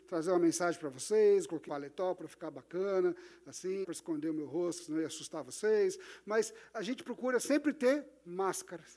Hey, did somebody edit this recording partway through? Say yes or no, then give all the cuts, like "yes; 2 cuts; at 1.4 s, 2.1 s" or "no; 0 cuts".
yes; 2 cuts; at 1.7 s, 3.8 s